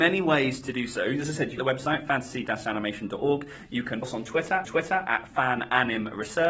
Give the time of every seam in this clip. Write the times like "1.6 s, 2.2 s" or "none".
1.6 s, 4.0 s, 4.6 s